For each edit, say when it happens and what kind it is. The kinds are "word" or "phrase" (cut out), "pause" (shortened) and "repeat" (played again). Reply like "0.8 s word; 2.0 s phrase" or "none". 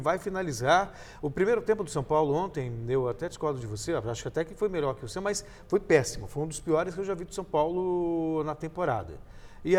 none